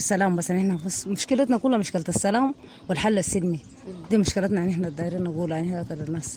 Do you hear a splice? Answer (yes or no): no